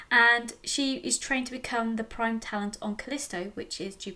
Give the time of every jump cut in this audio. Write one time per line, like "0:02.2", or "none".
none